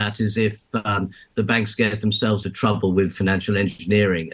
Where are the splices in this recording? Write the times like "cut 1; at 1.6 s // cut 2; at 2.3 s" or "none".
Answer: cut 1; at 2.4 s